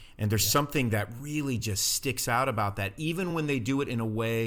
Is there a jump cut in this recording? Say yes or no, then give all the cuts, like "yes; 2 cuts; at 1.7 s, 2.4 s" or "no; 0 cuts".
no; 0 cuts